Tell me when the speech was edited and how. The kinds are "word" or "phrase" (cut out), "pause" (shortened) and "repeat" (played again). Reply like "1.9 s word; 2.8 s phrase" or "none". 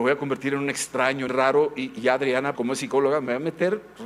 1.3 s word; 2.5 s word